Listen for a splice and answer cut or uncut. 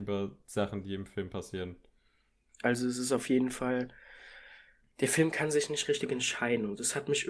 uncut